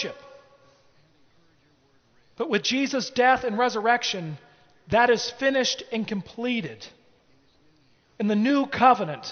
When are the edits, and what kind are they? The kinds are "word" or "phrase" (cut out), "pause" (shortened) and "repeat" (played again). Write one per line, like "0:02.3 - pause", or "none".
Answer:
none